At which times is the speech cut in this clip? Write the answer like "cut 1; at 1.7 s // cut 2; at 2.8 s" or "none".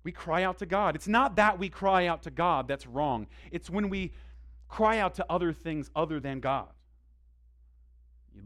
none